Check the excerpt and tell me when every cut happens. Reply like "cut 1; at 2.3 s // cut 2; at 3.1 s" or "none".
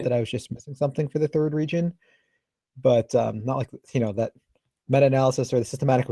none